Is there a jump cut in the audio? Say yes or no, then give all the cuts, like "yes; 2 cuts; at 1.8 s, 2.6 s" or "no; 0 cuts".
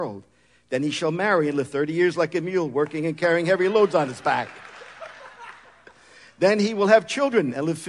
no; 0 cuts